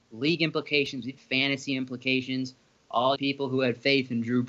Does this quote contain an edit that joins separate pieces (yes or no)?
yes